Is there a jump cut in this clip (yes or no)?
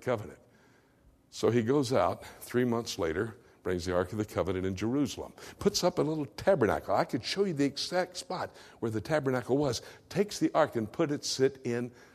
no